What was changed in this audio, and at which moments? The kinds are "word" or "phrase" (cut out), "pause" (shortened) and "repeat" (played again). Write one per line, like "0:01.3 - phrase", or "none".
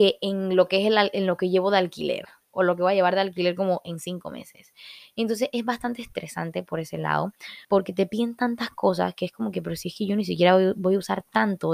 0:07.6 - pause